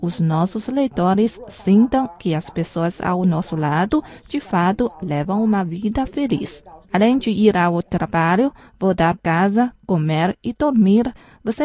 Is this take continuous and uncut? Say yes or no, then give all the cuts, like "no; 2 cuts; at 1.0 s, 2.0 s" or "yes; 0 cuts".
no; 2 cuts; at 6.8 s, 9.2 s